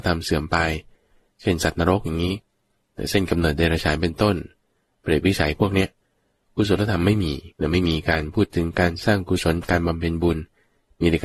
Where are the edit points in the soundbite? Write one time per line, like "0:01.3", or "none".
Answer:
0:07.5